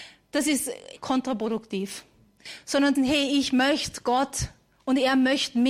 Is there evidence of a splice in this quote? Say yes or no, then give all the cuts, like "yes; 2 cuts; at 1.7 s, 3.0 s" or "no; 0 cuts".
yes; 2 cuts; at 1.0 s, 3.0 s